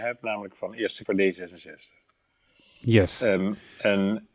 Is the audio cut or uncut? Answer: cut